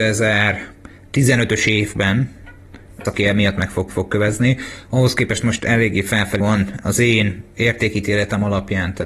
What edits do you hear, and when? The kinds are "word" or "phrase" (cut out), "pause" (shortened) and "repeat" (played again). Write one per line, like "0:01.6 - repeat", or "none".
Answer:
0:03.1 - word
0:03.9 - repeat
0:06.4 - phrase